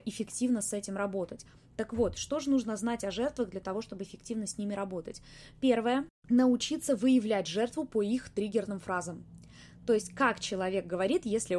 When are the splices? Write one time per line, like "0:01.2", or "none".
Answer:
0:06.2